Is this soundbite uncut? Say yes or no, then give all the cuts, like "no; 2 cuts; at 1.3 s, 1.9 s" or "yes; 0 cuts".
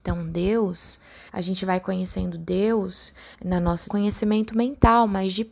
no; 3 cuts; at 1.3 s, 3.3 s, 3.9 s